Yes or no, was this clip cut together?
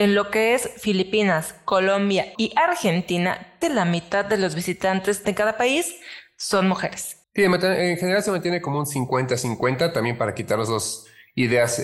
yes